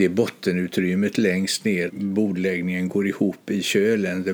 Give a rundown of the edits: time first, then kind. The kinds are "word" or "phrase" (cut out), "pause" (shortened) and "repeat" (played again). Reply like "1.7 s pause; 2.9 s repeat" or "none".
1.9 s word